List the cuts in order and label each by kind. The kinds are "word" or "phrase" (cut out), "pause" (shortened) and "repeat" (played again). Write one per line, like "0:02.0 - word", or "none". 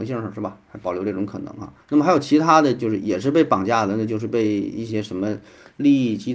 0:01.8 - pause